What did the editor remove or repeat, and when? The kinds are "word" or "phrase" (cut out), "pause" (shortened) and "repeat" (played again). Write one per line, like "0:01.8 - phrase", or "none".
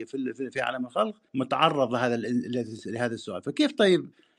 0:01.3 - pause